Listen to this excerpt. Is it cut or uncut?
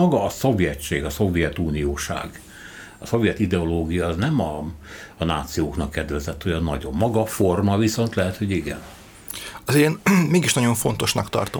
uncut